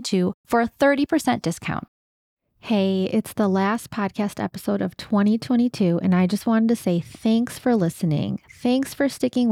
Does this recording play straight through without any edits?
yes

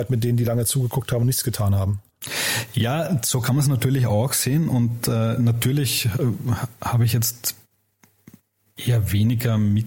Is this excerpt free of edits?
yes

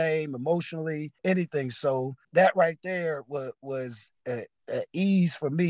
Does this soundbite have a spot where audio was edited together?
yes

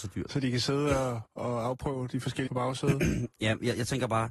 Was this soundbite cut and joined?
yes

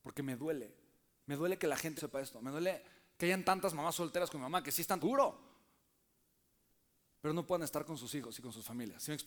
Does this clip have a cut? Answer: yes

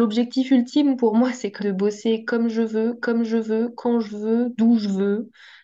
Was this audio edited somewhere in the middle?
yes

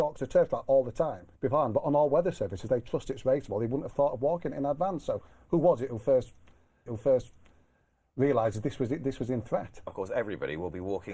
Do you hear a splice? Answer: yes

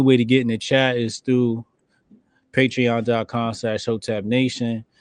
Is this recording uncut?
yes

